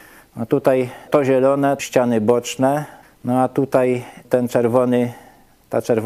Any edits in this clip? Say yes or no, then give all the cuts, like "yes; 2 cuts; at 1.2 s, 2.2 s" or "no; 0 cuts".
yes; 4 cuts; at 1.1 s, 1.8 s, 3.0 s, 4.2 s